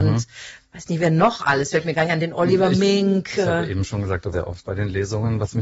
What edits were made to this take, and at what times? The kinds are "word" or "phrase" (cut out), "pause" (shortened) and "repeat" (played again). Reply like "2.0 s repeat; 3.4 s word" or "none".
4.3 s word; 4.6 s word